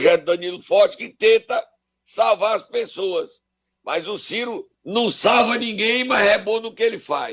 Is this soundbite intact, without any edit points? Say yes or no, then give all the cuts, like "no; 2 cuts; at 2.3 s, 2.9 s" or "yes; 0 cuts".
no; 1 cut; at 4.7 s